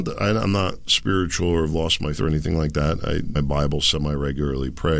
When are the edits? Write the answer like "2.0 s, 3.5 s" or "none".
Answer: 2.2 s, 3.3 s